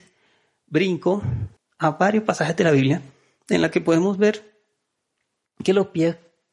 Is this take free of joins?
no; 1 cut; at 1.6 s

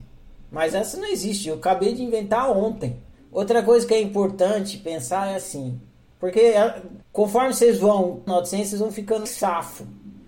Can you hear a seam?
yes; 4 cuts; at 3.1 s, 7.0 s, 8.3 s, 9.3 s

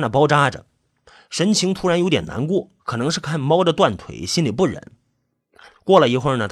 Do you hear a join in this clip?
yes; 1 cut; at 2.8 s

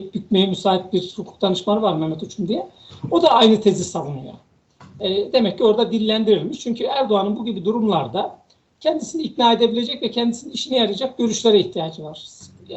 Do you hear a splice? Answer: no; 0 cuts

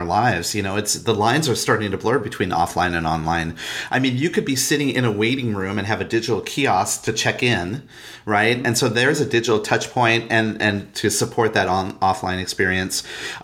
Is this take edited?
no; 0 cuts

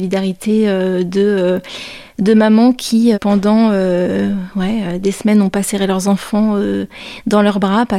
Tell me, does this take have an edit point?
yes; 1 cut; at 3.1 s

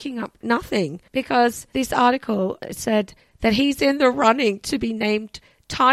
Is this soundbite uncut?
yes; 0 cuts

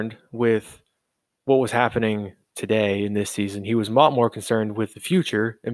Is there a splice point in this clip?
no; 0 cuts

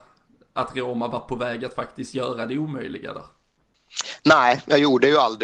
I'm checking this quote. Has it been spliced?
no; 0 cuts

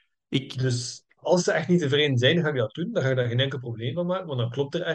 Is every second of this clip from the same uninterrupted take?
yes; 0 cuts

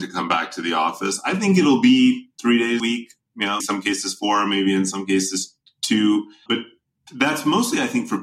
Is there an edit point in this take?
yes; 3 cuts; at 2.8 s, 3.6 s, 6.5 s

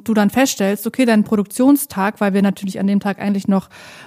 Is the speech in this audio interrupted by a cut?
no; 0 cuts

